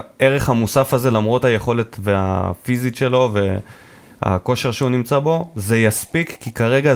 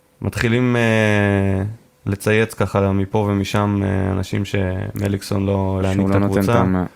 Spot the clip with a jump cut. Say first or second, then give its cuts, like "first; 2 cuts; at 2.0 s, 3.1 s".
second; 2 cuts; at 1.9 s, 5.8 s